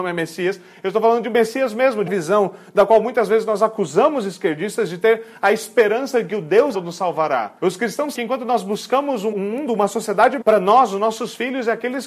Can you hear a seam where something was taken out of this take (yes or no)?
yes